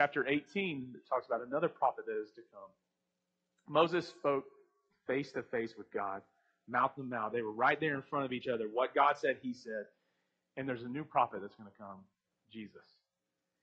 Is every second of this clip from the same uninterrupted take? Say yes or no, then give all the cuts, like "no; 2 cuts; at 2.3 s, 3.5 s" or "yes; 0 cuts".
yes; 0 cuts